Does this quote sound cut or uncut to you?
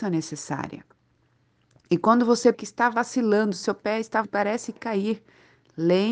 cut